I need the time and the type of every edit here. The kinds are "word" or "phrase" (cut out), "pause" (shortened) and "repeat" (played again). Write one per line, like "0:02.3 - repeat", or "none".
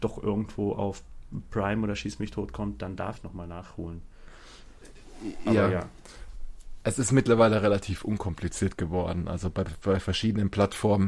0:03.2 - word